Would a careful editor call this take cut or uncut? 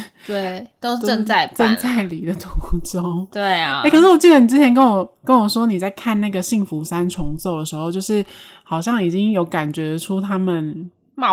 uncut